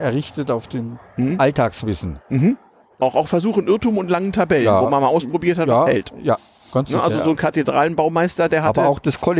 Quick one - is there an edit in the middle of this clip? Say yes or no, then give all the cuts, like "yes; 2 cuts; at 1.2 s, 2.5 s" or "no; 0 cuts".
no; 0 cuts